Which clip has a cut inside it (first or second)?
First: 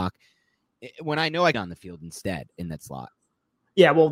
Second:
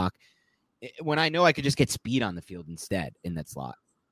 first